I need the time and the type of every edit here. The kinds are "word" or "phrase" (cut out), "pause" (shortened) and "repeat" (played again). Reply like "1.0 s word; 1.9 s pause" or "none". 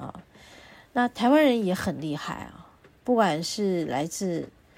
none